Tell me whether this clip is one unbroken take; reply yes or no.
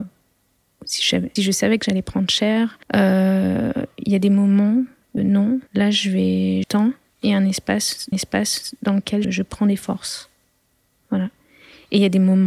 no